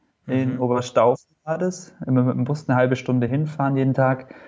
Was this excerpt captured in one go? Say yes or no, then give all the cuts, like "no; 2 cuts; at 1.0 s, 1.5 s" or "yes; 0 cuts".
yes; 0 cuts